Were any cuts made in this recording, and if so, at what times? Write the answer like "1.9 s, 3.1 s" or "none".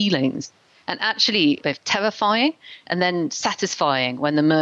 1.6 s